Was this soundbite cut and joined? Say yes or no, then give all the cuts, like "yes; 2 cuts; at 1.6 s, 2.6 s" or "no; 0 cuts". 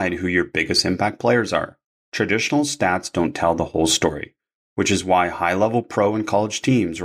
no; 0 cuts